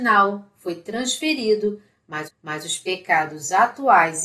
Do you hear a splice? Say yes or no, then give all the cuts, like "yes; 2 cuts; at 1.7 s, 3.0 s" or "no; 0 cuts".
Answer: yes; 1 cut; at 2.3 s